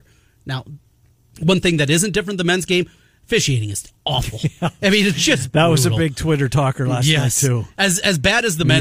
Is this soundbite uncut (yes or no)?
yes